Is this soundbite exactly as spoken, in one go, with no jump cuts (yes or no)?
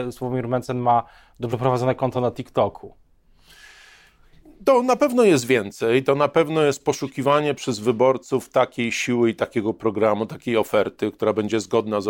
yes